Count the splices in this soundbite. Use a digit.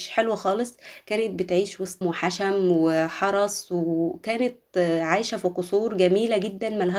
1